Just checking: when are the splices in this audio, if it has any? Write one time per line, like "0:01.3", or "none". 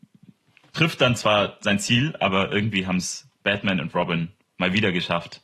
none